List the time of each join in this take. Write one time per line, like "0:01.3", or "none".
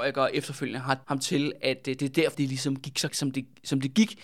0:01.0
0:02.3
0:03.1